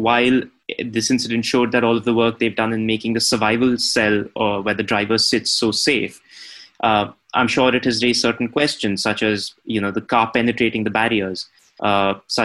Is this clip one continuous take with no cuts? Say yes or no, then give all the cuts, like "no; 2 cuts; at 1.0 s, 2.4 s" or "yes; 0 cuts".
yes; 0 cuts